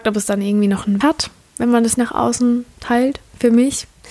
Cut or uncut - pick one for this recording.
cut